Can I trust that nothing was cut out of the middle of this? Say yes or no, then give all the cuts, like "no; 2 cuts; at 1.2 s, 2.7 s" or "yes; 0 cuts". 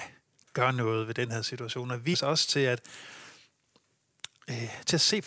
no; 1 cut; at 2.1 s